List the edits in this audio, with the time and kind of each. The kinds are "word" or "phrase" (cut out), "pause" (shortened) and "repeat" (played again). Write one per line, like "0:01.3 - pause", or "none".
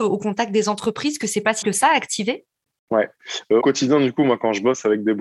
0:01.6 - word
0:02.7 - pause
0:03.6 - word